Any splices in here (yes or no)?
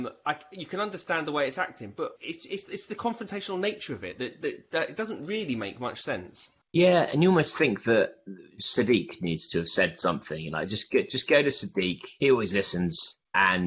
yes